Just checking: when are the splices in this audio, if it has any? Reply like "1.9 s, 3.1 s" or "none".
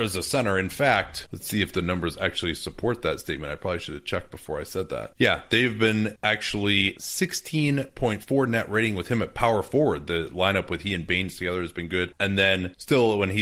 none